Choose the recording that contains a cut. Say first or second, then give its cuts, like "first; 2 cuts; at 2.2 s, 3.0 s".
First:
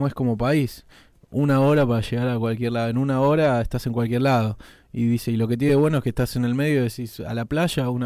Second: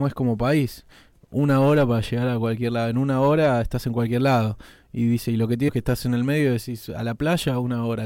second; 1 cut; at 5.7 s